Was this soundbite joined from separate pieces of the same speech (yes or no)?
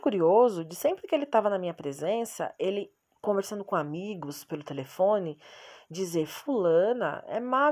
no